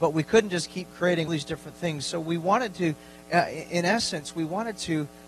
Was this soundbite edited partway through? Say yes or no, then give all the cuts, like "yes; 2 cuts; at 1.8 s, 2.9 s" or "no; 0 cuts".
yes; 1 cut; at 1.3 s